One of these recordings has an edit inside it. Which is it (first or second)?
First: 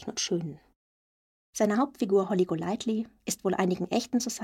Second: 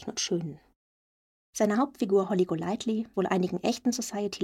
second